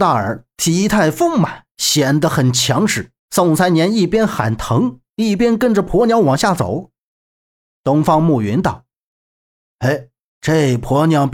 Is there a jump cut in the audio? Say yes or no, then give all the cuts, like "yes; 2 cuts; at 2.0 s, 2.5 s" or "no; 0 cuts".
yes; 1 cut; at 3.2 s